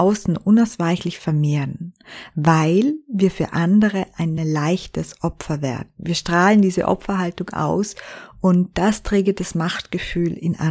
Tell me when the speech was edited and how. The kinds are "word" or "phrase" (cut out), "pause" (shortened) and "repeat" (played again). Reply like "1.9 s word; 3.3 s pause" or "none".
none